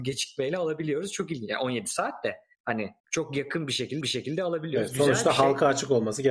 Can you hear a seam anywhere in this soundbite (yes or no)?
yes